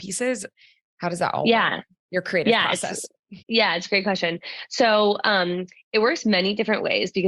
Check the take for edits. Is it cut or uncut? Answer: cut